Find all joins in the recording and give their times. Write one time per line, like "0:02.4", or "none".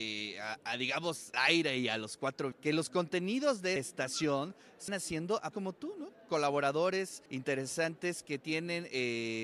0:01.3
0:02.5
0:03.8
0:04.9
0:05.5
0:07.3